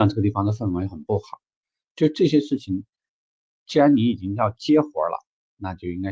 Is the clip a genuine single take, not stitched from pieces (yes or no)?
yes